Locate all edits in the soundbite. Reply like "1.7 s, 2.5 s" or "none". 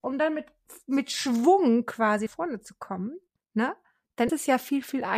2.3 s, 3.4 s, 4.3 s